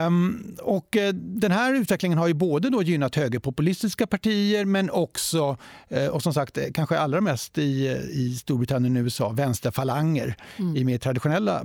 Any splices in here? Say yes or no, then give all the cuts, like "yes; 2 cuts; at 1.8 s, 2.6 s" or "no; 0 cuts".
no; 0 cuts